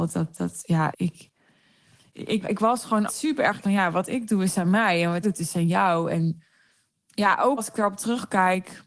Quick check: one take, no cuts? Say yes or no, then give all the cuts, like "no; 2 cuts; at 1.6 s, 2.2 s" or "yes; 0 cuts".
no; 7 cuts; at 0.9 s, 2.4 s, 3.1 s, 3.6 s, 5.2 s, 6.9 s, 7.6 s